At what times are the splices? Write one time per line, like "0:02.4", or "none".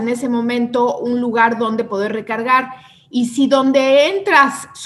none